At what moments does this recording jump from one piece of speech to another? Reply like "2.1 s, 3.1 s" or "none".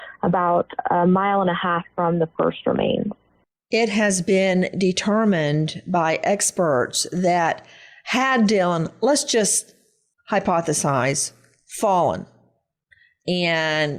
none